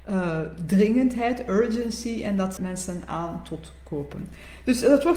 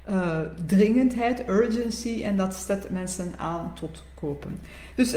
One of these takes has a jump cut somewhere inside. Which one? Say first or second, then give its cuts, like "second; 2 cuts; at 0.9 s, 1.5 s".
first; 1 cut; at 2.6 s